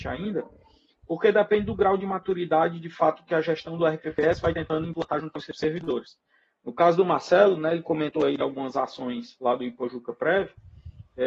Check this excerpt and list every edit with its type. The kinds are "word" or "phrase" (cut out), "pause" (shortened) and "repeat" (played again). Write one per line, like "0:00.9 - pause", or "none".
none